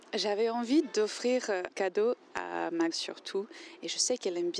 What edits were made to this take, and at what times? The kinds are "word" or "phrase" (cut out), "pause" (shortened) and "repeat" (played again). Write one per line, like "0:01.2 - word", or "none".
0:01.7 - word
0:02.9 - word

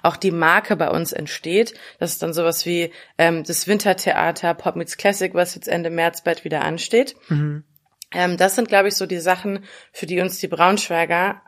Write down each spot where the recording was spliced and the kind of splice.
none

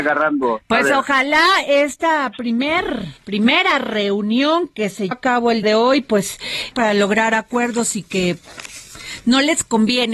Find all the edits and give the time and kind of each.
0:03.2 - pause
0:05.1 - word
0:05.6 - word
0:06.7 - phrase

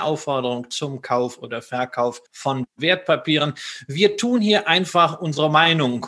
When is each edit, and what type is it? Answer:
0:02.3 - pause

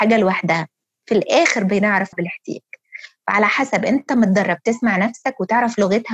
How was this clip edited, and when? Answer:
0:02.1 - word

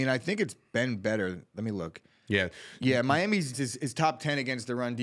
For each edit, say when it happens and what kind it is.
0:03.5 - word

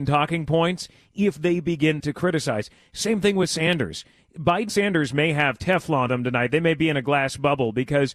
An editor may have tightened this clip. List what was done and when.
0:02.0 - word
0:04.7 - word
0:06.1 - word

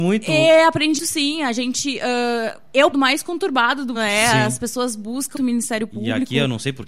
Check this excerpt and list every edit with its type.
0:01.0 - word
0:02.9 - word
0:03.9 - word
0:05.3 - word

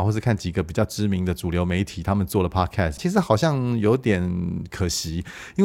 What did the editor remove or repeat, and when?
0:03.0 - word

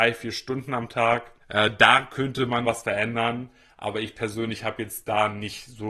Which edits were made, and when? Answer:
0:01.4 - pause
0:02.6 - word

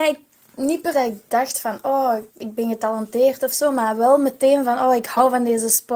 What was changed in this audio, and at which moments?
0:00.9 - word
0:02.3 - pause

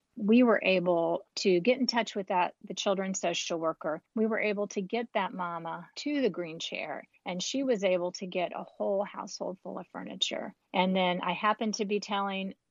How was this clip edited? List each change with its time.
0:04.1 - pause

